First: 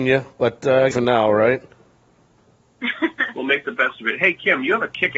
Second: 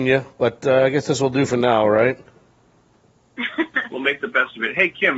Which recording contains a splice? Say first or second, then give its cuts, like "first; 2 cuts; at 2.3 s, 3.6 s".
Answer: first; 1 cut; at 0.9 s